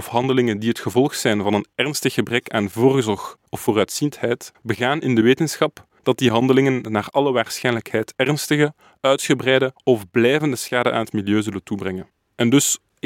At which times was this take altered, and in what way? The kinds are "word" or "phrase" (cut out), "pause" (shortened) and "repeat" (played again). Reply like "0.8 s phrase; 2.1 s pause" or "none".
none